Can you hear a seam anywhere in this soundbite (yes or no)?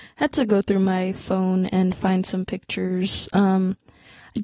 no